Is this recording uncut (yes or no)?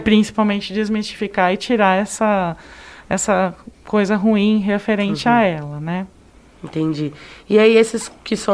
yes